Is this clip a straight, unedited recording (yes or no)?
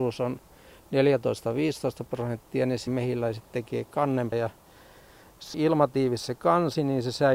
no